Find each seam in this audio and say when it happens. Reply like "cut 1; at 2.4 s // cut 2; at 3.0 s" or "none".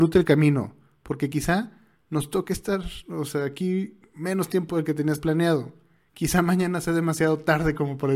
none